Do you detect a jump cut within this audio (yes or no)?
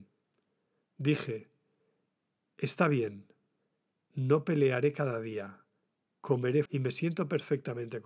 yes